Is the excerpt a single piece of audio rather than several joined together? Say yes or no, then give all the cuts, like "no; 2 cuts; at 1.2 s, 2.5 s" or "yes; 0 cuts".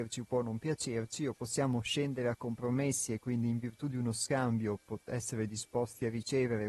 yes; 0 cuts